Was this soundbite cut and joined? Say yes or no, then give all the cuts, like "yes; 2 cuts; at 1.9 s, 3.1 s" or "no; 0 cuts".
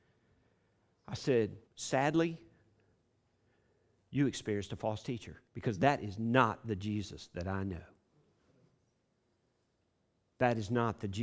yes; 2 cuts; at 1.6 s, 5.5 s